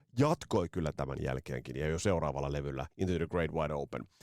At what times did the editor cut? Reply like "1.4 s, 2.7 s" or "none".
2.9 s